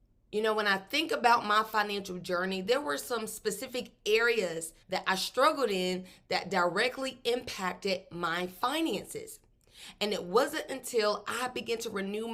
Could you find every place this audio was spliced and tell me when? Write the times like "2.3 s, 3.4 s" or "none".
4.8 s